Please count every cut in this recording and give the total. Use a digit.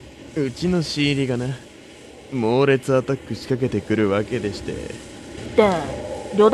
1